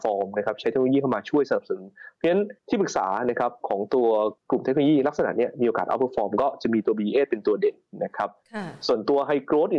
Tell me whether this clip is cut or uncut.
cut